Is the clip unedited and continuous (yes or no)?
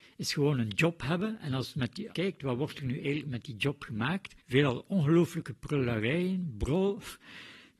no